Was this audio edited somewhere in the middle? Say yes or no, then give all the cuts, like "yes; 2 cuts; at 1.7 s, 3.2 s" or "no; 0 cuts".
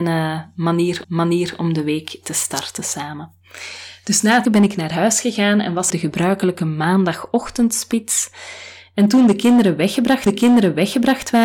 yes; 4 cuts; at 1.0 s, 4.4 s, 5.9 s, 10.3 s